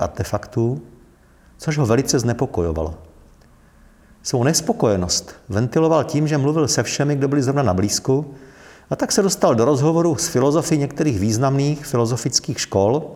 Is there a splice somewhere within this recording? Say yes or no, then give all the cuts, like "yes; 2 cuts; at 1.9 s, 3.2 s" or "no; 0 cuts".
no; 0 cuts